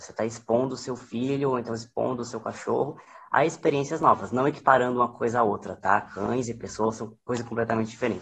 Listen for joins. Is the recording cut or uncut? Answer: uncut